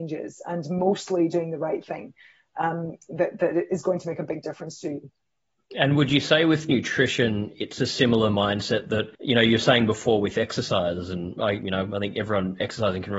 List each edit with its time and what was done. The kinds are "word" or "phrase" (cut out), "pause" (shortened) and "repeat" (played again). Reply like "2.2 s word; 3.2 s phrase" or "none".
9.1 s pause

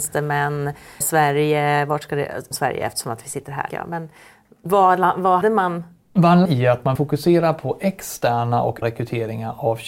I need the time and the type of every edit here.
1.0 s word; 2.5 s word; 3.7 s word; 5.4 s word; 6.5 s word; 7.0 s word; 8.8 s word

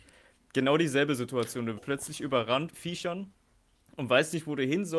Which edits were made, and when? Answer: 1.8 s word; 2.7 s word

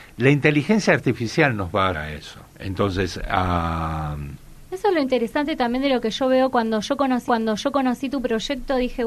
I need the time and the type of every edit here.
1.9 s word; 2.5 s pause; 7.3 s repeat

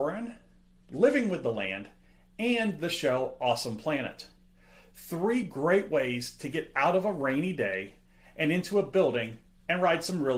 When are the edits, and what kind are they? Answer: none

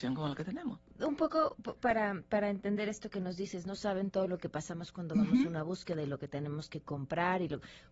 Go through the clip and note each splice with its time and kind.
none

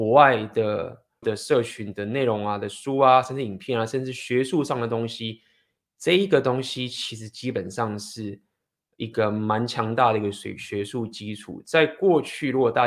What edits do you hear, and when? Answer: 1.2 s word

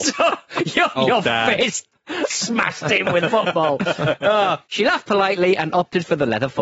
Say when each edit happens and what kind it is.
1.0 s word; 3.2 s word; 4.6 s pause

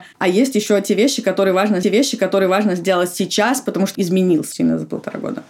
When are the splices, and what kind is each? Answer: 1.8 s repeat; 3.9 s word; 4.5 s word

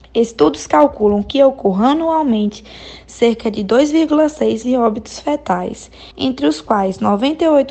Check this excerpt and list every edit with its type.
4.6 s word; 6.1 s pause

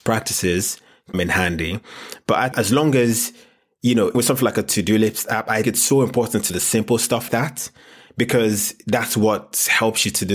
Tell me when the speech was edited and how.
1.1 s word; 2.5 s word; 4.1 s word; 5.6 s word; 6.5 s word; 7.3 s word

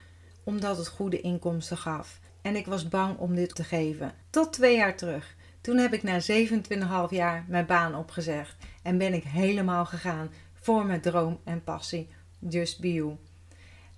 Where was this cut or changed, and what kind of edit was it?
2.3 s pause; 3.5 s word; 4.2 s pause

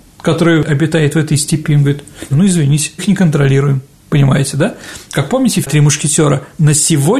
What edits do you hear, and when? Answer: 2.3 s word; 3.0 s word; 5.6 s word

